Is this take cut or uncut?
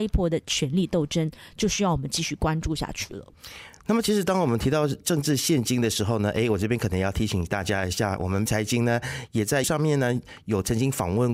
cut